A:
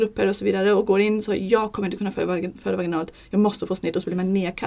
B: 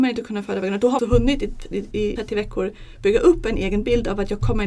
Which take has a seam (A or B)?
B